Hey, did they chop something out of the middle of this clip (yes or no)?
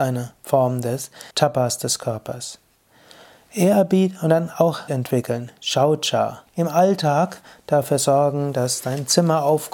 yes